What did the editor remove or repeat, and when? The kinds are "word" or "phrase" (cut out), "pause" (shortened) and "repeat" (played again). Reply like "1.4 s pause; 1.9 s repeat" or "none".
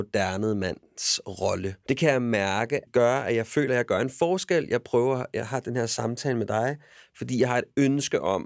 none